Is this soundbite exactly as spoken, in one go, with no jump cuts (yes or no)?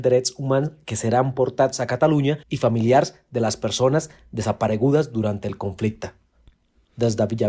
no